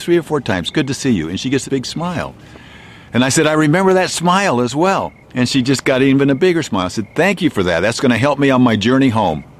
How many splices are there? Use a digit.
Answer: 2